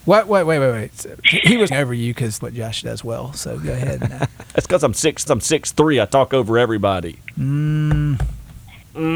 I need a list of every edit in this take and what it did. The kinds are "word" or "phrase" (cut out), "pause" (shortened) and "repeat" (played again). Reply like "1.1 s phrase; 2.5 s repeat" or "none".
1.7 s word; 2.4 s word; 5.3 s repeat

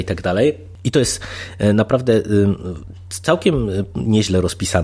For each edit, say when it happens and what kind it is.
none

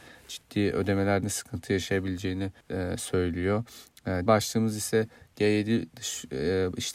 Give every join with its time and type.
1.2 s word; 2.6 s pause; 4.3 s word

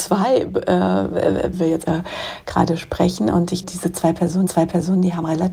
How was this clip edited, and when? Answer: 1.5 s phrase; 1.8 s word; 3.6 s word; 4.5 s repeat

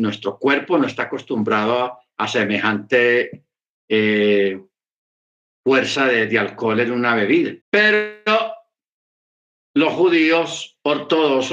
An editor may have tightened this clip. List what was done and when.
3.8 s pause; 7.6 s pause

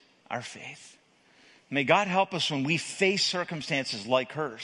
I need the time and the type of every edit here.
none

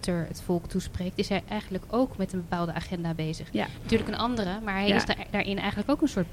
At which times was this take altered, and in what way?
none

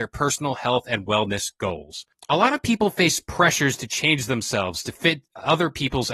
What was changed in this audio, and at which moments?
none

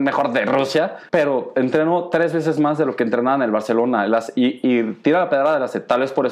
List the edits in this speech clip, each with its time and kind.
1.1 s pause

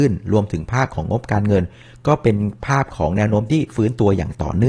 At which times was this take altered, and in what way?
none

